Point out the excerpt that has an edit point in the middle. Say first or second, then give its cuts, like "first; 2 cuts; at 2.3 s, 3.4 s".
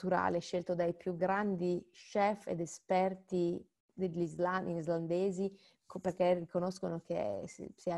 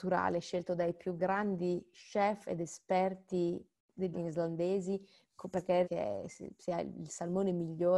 second; 2 cuts; at 4.1 s, 5.8 s